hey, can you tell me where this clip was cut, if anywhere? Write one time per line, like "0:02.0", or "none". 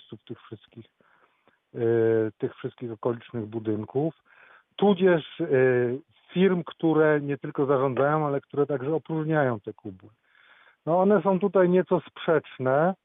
none